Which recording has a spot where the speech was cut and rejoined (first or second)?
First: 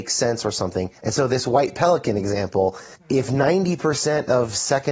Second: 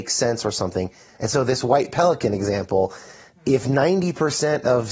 first